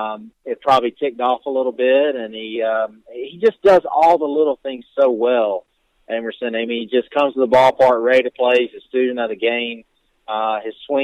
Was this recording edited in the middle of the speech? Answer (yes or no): no